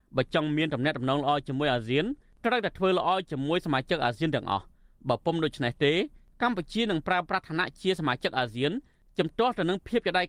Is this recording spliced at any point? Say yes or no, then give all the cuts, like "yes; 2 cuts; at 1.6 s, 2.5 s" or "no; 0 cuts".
no; 0 cuts